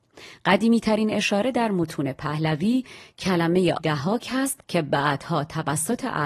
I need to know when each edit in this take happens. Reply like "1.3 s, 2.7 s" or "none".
3.8 s, 4.6 s